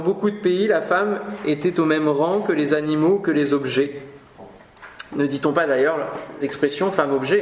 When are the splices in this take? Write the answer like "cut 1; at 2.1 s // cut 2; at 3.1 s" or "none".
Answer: cut 1; at 6.4 s